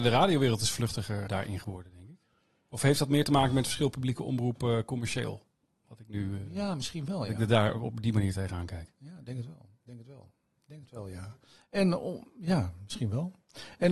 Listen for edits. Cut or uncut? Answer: cut